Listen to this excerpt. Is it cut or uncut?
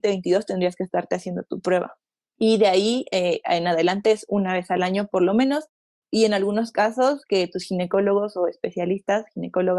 uncut